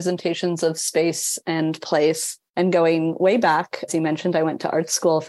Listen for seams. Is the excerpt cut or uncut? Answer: cut